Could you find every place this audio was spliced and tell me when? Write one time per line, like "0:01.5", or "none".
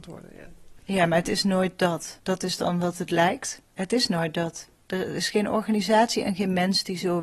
0:02.2
0:03.7